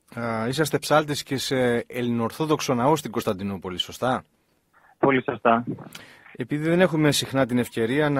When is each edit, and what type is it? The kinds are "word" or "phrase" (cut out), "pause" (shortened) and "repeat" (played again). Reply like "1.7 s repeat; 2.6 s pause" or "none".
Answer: none